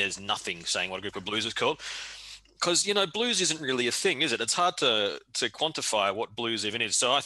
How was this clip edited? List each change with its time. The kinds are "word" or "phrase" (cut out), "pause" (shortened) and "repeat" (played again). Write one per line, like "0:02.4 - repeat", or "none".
none